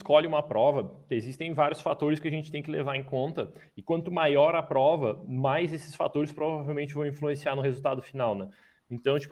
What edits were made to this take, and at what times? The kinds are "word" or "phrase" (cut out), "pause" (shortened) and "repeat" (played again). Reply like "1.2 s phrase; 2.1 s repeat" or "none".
none